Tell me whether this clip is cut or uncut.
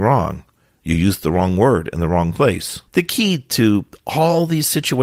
cut